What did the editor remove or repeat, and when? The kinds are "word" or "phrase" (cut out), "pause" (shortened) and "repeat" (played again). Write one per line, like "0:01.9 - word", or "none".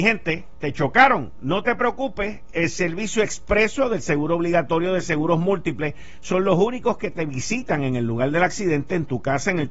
none